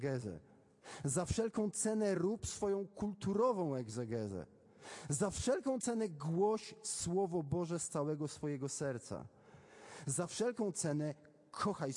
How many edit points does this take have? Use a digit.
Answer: 0